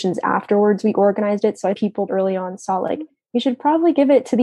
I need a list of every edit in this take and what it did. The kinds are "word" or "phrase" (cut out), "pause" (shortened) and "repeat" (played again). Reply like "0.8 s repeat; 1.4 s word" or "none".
1.7 s word; 2.1 s word